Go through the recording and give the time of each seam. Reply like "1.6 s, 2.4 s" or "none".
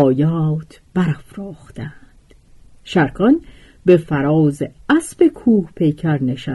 none